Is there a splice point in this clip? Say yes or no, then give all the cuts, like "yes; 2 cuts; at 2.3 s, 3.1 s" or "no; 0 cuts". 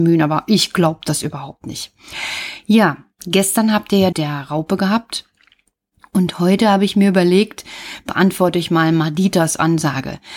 yes; 1 cut; at 4.1 s